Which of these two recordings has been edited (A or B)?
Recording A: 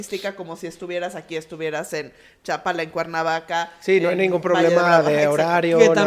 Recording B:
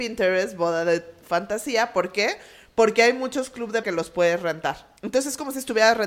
B